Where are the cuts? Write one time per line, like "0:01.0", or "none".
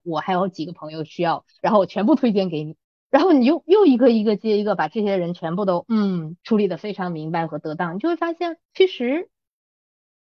0:02.8
0:06.4
0:08.6